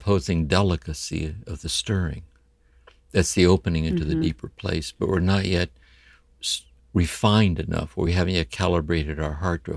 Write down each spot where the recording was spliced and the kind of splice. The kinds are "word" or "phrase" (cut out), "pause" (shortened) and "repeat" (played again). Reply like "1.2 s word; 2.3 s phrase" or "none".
none